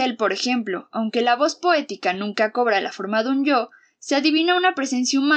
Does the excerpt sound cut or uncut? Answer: uncut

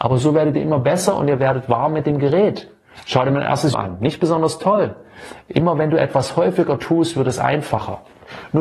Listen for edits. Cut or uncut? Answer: cut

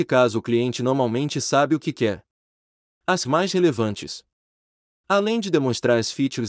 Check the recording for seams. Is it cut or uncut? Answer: cut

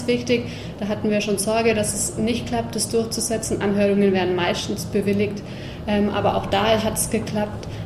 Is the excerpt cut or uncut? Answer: uncut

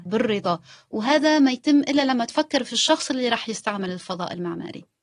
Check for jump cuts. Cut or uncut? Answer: uncut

